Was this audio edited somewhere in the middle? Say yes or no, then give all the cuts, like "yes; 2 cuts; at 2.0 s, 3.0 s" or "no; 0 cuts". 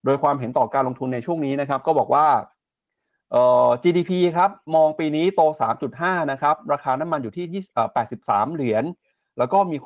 no; 0 cuts